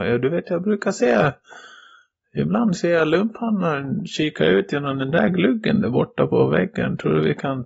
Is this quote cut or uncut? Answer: uncut